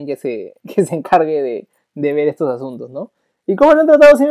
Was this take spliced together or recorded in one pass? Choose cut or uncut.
uncut